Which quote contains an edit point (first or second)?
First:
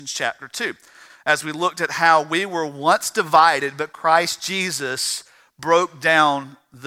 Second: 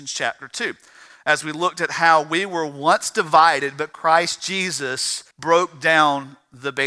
second